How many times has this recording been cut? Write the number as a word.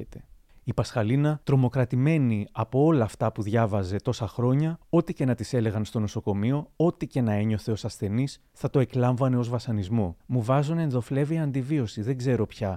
three